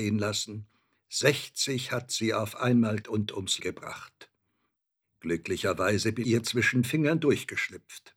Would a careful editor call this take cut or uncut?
cut